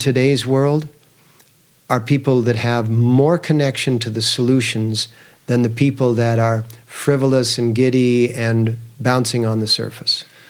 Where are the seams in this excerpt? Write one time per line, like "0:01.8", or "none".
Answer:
none